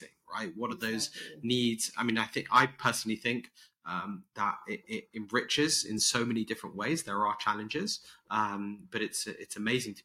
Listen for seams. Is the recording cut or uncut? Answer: uncut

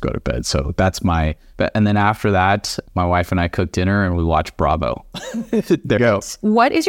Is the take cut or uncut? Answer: cut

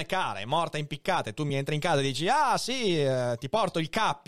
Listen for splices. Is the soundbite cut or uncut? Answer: uncut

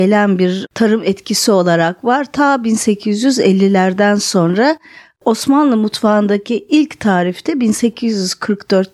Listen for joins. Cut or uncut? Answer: uncut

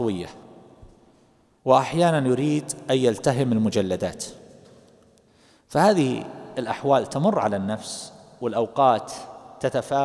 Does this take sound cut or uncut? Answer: uncut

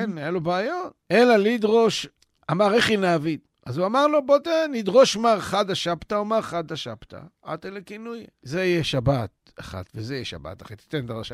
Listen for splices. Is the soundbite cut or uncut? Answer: cut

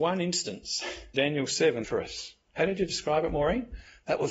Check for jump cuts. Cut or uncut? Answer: cut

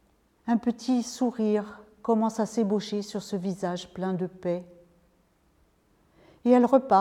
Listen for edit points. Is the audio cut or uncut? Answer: uncut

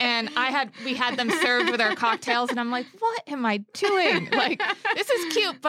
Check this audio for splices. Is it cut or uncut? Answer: uncut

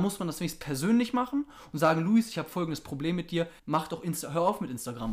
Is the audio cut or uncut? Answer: cut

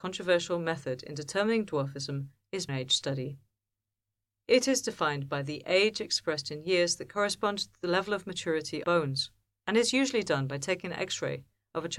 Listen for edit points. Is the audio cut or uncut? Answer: cut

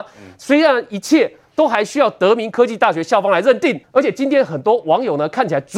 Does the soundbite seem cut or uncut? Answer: cut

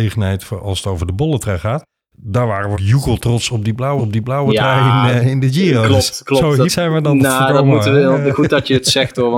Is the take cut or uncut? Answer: cut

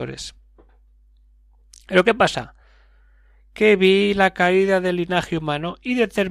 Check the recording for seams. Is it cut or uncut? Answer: uncut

